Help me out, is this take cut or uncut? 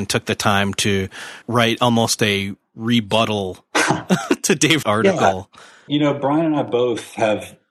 cut